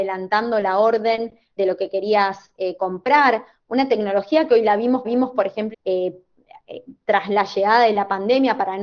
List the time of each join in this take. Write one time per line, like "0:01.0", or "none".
0:01.6
0:05.0
0:05.7